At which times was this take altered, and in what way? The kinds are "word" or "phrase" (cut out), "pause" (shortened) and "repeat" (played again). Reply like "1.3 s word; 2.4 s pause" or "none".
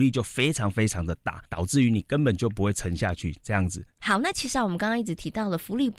1.4 s pause